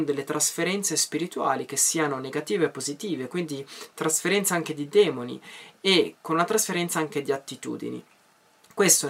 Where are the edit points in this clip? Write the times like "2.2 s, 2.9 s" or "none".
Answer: none